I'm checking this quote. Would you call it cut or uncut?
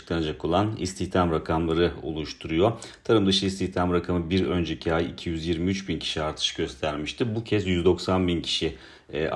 uncut